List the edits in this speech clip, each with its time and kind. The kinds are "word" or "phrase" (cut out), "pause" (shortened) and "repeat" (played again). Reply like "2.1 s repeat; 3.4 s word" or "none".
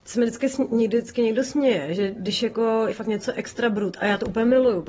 2.9 s word